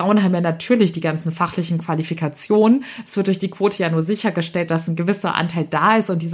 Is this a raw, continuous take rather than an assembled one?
yes; 0 cuts

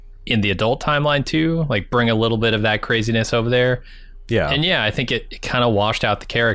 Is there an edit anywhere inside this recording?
no; 0 cuts

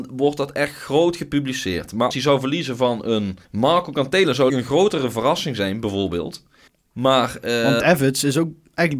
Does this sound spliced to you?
yes; 5 cuts; at 2.1 s, 3.4 s, 4.5 s, 6.7 s, 7.8 s

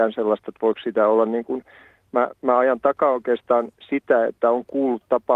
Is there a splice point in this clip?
no; 0 cuts

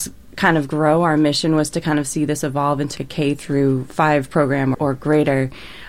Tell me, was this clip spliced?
yes; 2 cuts; at 3.0 s, 4.7 s

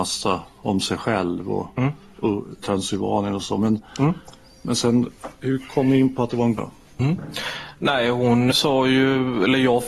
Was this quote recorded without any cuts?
no; 3 cuts; at 2.6 s, 6.6 s, 8.5 s

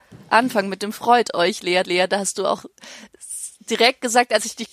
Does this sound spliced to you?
yes; 1 cut; at 1.8 s

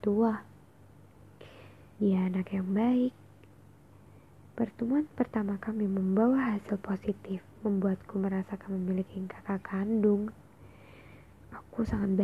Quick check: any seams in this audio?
no; 0 cuts

